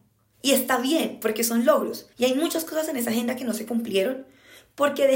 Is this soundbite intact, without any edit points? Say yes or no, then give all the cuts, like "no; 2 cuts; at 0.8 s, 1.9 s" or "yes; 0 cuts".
no; 1 cut; at 2.1 s